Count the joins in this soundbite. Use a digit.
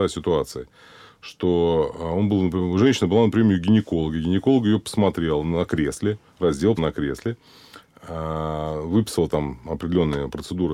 1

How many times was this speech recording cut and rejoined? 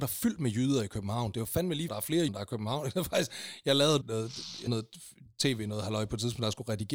4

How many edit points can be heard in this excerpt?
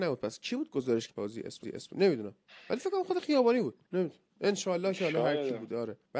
3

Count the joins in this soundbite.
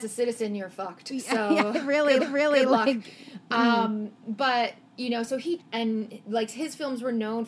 2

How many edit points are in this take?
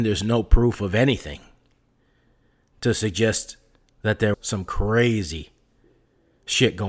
1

